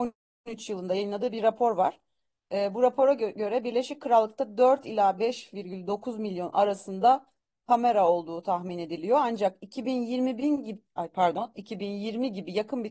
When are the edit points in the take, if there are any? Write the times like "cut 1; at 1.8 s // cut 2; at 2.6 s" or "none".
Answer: none